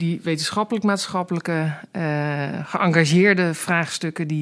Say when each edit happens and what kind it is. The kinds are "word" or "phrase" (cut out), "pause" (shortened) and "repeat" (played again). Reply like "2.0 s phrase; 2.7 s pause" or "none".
none